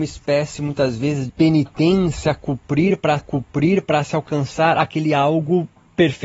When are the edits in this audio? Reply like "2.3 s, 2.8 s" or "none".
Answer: 1.3 s, 3.2 s